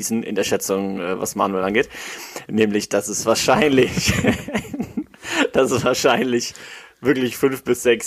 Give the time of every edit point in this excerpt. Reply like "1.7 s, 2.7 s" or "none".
none